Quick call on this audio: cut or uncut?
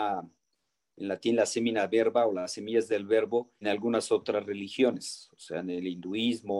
cut